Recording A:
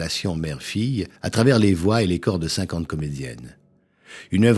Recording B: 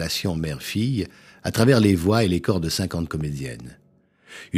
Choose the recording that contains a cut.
A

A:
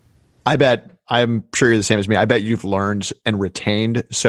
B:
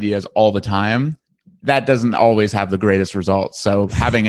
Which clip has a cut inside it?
B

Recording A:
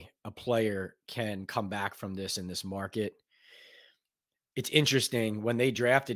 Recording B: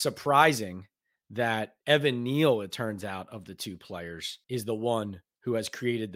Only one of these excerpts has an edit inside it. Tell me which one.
B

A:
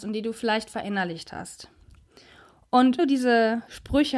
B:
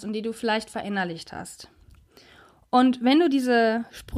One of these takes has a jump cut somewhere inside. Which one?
A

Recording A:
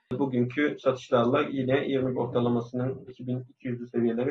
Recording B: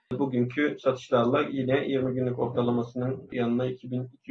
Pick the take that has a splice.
A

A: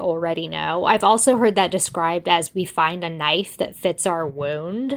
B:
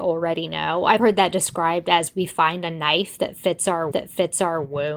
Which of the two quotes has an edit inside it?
B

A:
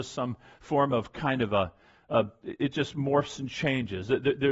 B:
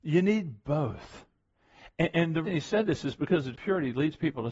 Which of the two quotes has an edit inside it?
B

